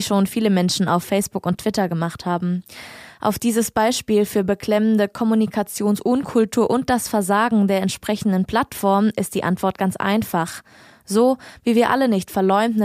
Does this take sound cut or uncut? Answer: uncut